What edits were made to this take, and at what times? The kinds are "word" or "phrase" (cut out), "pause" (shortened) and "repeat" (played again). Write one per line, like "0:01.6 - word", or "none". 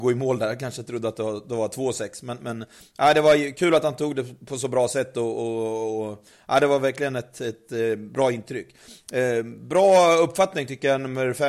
none